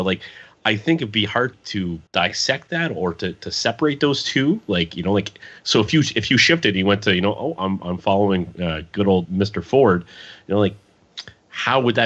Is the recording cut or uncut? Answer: cut